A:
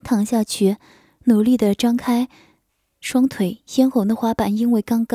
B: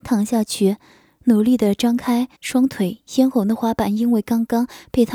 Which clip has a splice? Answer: B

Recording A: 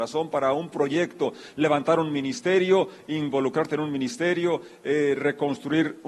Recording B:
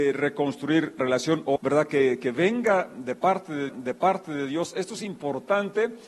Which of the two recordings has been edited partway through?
B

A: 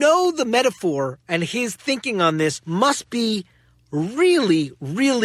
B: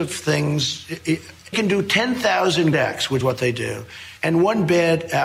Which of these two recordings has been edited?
B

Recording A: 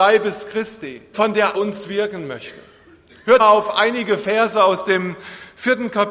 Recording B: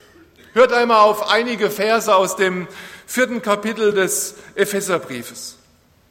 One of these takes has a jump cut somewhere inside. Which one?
A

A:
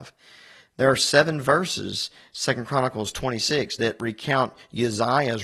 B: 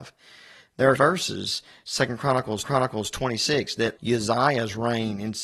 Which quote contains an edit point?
B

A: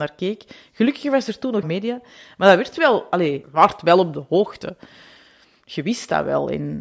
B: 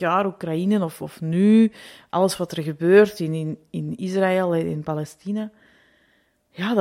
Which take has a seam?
A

